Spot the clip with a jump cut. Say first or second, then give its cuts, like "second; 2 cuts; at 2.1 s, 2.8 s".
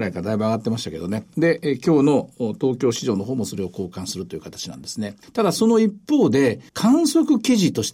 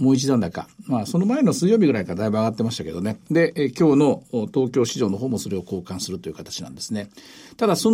first; 2 cuts; at 5.2 s, 6.7 s